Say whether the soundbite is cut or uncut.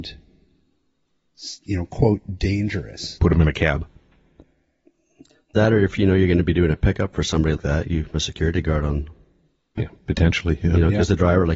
cut